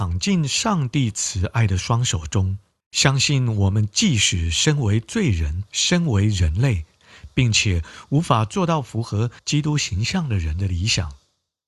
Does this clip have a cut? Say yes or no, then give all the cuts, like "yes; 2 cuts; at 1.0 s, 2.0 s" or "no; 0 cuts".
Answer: yes; 3 cuts; at 2.8 s, 5.7 s, 9.4 s